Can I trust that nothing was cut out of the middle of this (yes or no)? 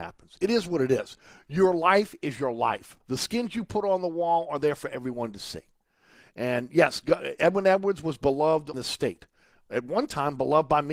no